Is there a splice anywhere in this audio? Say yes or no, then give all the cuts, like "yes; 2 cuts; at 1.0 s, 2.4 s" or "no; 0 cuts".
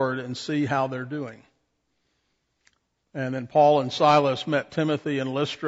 no; 0 cuts